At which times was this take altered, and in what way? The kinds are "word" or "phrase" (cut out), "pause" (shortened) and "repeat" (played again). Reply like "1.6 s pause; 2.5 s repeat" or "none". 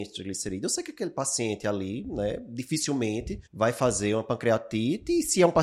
3.5 s pause